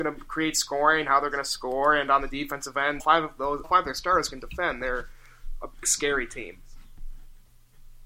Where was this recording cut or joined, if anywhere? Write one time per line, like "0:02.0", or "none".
0:03.0
0:03.6
0:05.8